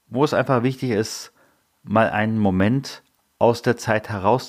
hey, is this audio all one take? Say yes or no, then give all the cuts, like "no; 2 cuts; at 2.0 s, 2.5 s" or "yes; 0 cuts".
yes; 0 cuts